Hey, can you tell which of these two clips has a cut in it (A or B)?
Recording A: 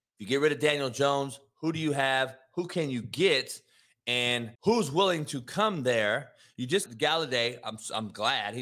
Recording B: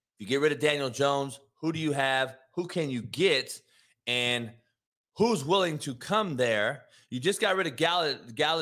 A